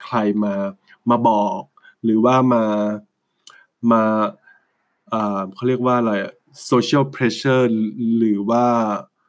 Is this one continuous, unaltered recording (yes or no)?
yes